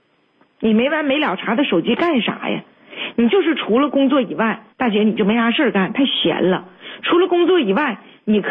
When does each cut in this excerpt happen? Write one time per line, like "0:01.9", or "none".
0:04.7